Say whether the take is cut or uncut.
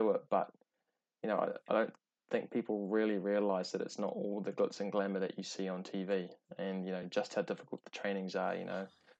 uncut